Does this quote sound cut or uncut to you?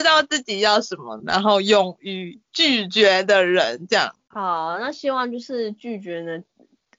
cut